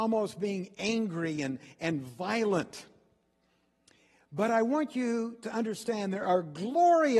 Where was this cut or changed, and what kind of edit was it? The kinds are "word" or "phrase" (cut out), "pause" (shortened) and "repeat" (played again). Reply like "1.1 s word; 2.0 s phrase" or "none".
none

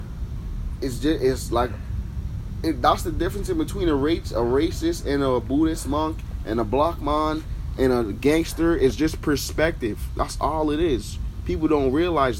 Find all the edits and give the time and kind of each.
none

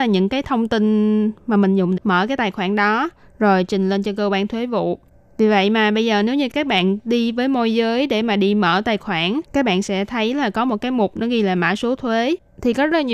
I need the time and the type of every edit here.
2.0 s word; 9.5 s pause

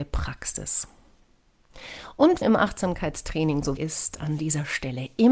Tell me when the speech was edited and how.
2.4 s phrase; 3.8 s word

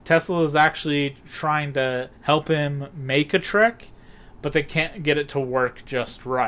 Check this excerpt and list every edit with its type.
2.2 s pause

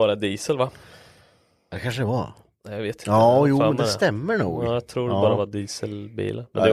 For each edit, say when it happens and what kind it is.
none

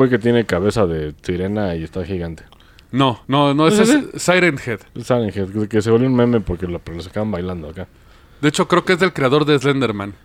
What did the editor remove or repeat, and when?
3.2 s pause

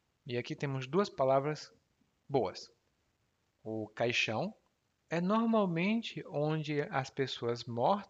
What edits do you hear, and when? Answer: 4.7 s pause

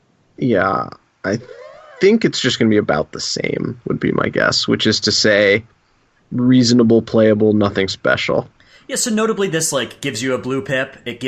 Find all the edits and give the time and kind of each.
none

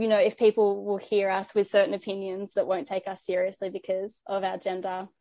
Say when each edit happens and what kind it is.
4.2 s pause

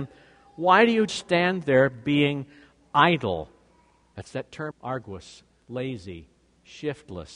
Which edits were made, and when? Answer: 1.1 s word; 4.7 s word; 5.6 s word

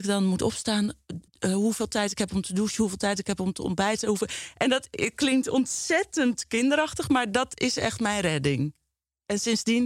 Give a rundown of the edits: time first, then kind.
1.3 s pause

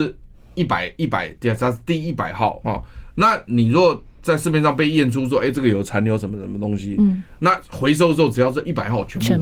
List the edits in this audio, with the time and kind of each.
2.6 s word

